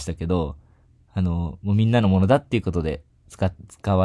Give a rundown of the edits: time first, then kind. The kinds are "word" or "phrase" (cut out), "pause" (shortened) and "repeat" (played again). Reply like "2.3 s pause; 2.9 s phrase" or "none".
none